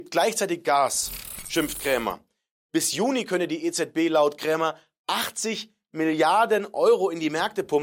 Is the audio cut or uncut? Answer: uncut